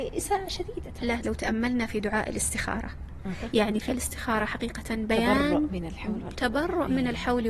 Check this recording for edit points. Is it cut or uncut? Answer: cut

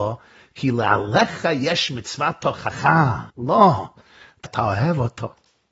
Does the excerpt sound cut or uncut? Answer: cut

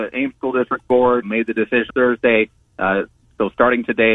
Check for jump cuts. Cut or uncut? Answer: cut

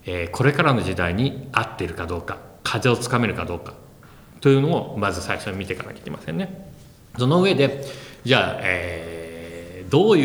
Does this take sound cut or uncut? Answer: uncut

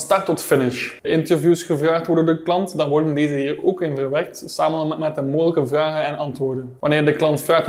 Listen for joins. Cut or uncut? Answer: cut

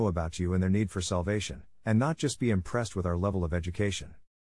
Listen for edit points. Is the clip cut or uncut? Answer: uncut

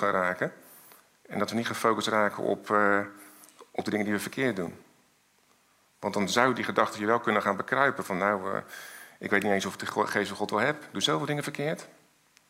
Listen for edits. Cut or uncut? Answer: uncut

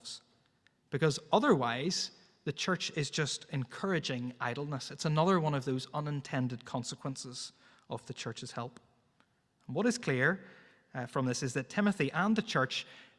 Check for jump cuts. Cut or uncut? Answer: uncut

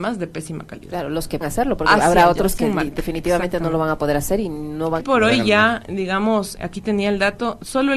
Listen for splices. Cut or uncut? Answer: cut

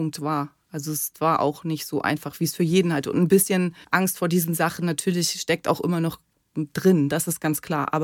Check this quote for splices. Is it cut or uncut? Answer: cut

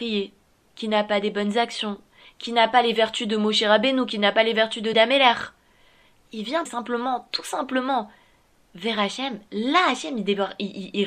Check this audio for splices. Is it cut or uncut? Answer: cut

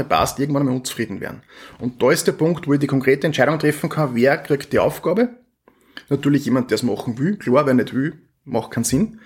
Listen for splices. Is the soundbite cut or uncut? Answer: uncut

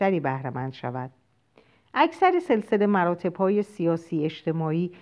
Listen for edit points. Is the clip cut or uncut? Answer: uncut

